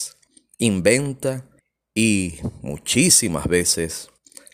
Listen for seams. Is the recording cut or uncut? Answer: cut